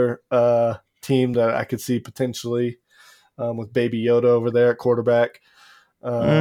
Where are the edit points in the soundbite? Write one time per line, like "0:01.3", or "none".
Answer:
none

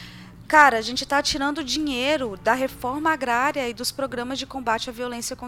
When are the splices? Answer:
none

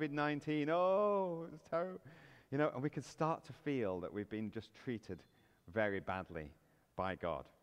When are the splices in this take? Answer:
none

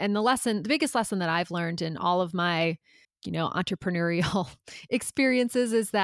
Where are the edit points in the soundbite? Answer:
0:03.0

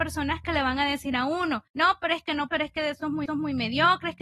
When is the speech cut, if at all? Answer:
0:01.7
0:02.5
0:03.3

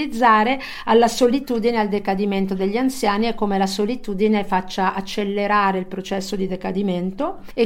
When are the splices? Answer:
none

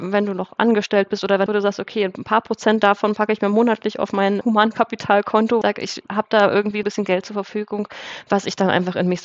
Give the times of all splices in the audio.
0:01.5
0:04.4
0:05.6
0:06.1
0:06.8

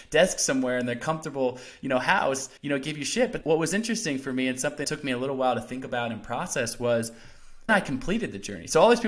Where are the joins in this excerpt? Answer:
0:02.6
0:03.4
0:04.8
0:07.7

